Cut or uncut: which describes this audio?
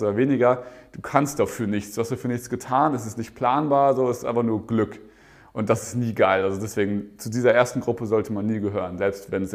uncut